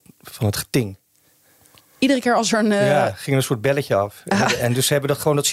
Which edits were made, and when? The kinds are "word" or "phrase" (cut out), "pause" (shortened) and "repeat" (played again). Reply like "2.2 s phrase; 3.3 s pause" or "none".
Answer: none